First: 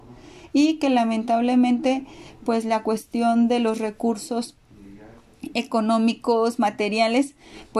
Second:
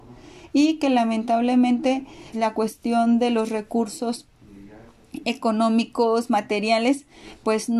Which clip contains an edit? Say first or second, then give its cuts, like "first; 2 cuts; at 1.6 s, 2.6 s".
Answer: second; 1 cut; at 2.3 s